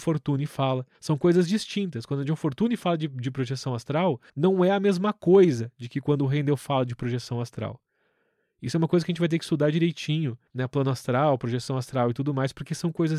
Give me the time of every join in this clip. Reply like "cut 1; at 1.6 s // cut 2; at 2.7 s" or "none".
cut 1; at 0.9 s // cut 2; at 4.3 s // cut 3; at 10.5 s